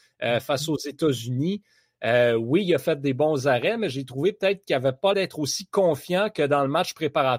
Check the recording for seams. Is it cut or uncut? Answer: cut